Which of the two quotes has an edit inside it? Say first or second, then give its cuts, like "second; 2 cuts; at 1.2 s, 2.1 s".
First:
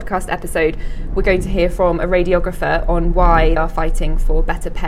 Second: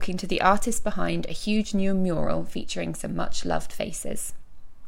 first; 1 cut; at 3.6 s